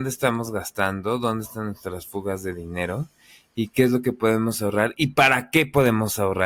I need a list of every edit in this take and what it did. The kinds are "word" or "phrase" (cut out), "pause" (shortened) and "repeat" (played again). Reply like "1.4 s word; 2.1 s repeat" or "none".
none